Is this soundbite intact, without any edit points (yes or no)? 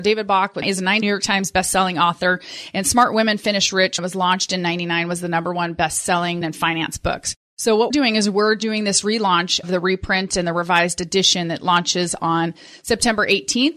no